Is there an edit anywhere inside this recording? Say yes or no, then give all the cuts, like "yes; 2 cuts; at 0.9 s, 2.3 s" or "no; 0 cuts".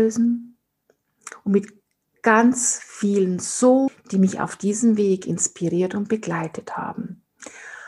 yes; 1 cut; at 3.9 s